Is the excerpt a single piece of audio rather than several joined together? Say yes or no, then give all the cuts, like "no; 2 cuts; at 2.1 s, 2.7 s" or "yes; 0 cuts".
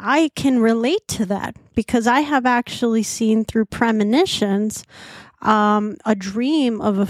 yes; 0 cuts